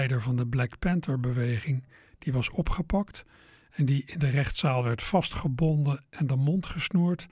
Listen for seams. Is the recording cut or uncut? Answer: uncut